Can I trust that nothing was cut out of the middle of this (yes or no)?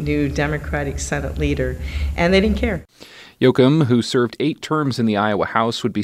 yes